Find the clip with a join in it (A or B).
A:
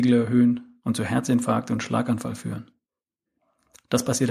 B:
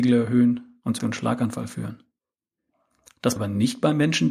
B